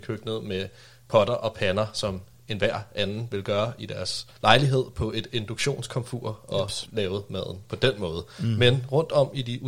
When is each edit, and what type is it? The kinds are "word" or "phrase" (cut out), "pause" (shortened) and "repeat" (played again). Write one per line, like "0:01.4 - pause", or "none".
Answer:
0:04.3 - pause